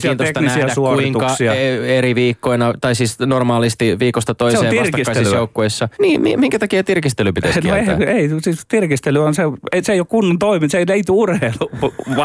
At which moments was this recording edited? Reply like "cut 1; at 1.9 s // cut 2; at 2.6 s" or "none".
cut 1; at 5.9 s